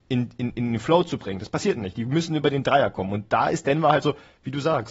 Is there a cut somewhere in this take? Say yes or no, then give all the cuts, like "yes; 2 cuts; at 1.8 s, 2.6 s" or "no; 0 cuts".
no; 0 cuts